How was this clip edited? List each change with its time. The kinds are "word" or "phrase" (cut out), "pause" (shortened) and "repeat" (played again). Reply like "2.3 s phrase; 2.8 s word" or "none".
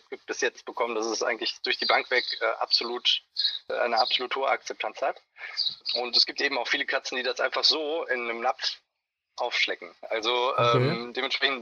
none

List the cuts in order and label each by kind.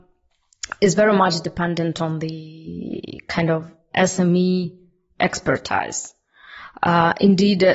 none

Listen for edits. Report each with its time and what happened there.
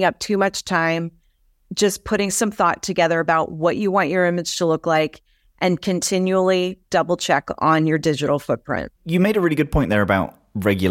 9.0 s pause

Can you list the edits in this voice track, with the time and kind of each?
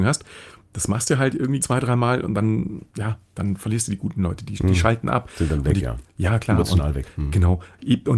1.6 s word; 2.9 s pause

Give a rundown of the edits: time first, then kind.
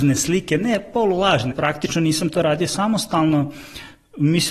1.5 s word

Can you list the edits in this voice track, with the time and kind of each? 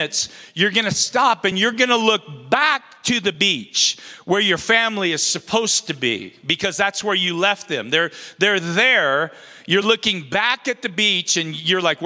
none

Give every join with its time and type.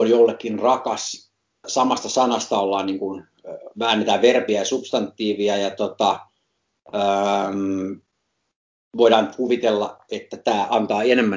1.6 s word

